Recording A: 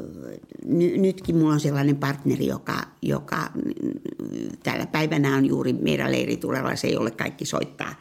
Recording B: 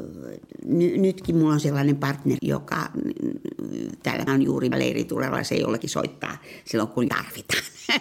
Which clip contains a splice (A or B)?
B